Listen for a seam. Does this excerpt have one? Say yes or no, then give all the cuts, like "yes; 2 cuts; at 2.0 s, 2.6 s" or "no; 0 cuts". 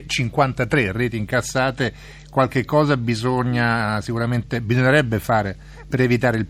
no; 0 cuts